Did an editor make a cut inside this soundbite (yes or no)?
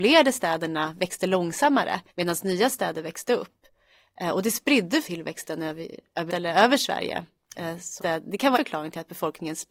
yes